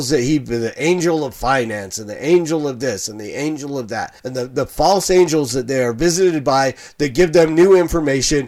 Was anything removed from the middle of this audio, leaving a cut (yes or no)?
yes